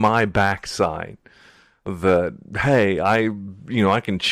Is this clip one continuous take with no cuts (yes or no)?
yes